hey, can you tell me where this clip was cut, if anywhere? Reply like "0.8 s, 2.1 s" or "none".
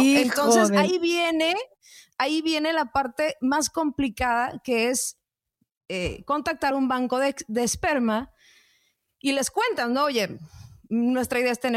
none